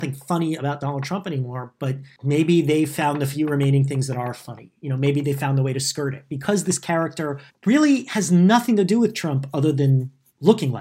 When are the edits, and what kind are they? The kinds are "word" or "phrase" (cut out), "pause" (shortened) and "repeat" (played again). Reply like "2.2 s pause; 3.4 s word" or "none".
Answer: 7.5 s pause